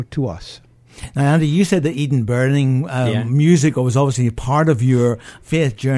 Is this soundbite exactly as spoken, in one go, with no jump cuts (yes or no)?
yes